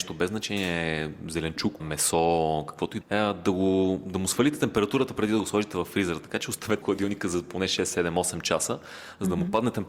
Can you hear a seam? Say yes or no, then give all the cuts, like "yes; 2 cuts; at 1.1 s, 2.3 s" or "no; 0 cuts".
yes; 3 cuts; at 1.8 s, 3.0 s, 6.8 s